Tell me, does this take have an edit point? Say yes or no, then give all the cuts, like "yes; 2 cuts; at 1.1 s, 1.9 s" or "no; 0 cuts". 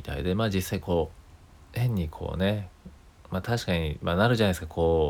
no; 0 cuts